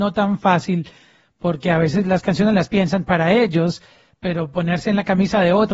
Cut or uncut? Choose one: uncut